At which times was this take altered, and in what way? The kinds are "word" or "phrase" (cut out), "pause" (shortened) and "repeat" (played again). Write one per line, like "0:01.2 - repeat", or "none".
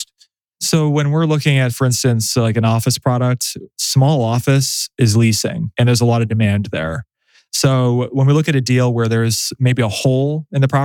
none